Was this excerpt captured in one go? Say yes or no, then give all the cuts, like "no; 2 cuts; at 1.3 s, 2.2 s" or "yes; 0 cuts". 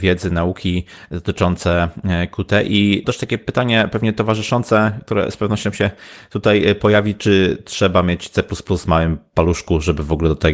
no; 1 cut; at 3.0 s